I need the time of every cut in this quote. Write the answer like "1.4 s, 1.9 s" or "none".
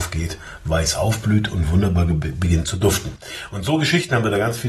none